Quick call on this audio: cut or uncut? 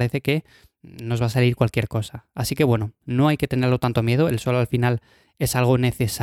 uncut